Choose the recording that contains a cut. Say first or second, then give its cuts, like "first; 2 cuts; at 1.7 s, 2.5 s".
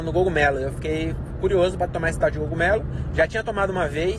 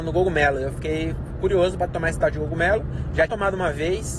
second; 1 cut; at 3.3 s